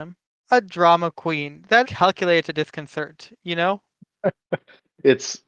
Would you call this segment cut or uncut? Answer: cut